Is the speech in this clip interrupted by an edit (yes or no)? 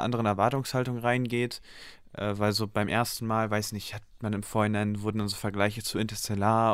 no